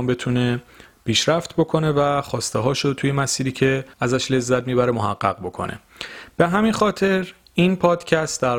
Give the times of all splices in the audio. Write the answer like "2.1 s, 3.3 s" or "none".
3.9 s